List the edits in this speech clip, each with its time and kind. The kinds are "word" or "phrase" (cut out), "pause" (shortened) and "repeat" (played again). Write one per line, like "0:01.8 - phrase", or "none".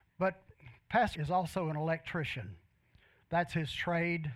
0:01.1 - word